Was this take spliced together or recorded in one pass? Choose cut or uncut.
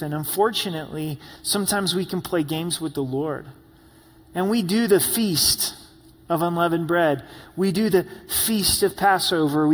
uncut